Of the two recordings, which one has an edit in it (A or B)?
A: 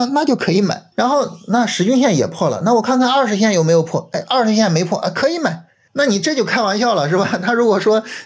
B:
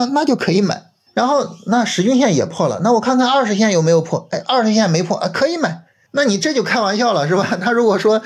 A